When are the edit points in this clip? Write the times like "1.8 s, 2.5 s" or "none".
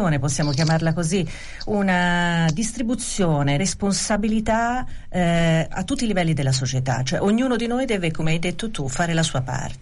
3.6 s